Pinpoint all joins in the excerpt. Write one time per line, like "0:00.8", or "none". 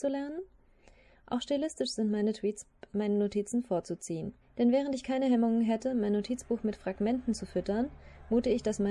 0:02.9
0:04.4